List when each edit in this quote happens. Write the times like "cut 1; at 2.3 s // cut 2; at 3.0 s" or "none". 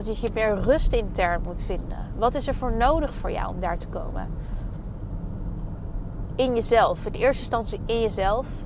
none